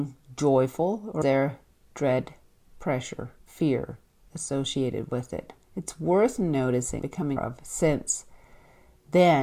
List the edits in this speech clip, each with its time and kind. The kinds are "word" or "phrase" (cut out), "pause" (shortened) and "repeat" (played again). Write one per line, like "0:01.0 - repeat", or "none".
0:01.2 - word
0:03.4 - pause
0:05.6 - pause
0:07.0 - word
0:07.4 - word